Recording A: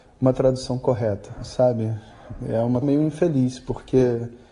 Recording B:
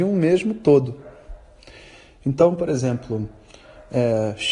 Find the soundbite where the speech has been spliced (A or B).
A